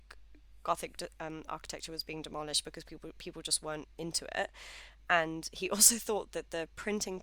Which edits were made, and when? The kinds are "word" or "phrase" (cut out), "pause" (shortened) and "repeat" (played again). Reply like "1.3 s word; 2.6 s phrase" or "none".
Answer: none

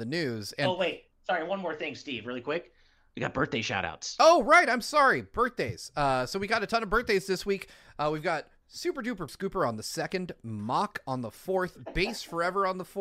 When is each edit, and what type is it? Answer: 1.1 s pause; 9.3 s word

